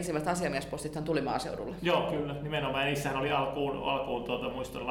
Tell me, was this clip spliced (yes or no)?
no